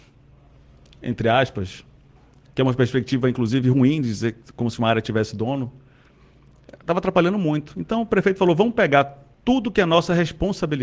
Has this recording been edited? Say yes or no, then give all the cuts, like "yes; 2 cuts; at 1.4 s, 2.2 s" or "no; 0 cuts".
no; 0 cuts